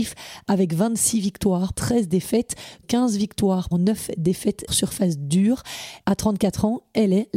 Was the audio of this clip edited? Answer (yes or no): yes